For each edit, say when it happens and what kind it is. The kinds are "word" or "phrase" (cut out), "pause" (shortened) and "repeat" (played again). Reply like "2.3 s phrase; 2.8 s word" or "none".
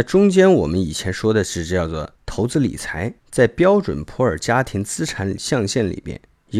2.2 s pause; 3.2 s pause